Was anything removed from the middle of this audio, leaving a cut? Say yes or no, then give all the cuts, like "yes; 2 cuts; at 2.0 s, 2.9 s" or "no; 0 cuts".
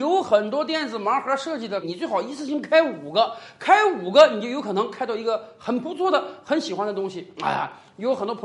yes; 1 cut; at 1.8 s